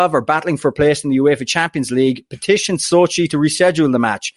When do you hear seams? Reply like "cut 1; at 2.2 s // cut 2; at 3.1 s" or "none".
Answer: none